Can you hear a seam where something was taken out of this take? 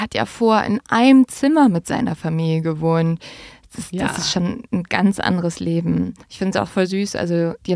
yes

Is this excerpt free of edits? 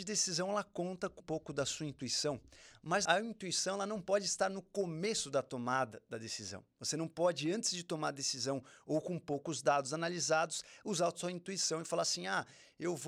no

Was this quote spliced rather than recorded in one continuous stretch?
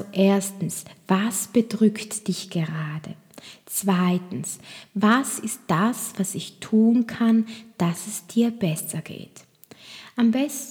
no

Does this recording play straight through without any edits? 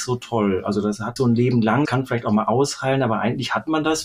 no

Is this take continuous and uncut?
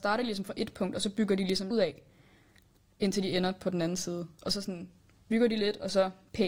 no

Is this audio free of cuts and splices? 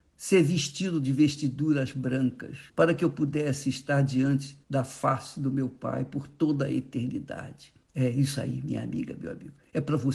no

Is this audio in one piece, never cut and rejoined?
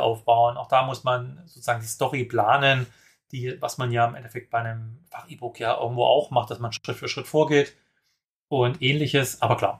yes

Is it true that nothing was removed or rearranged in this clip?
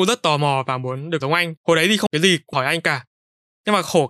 no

